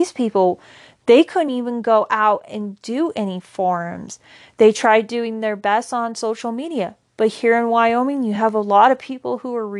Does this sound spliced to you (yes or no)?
no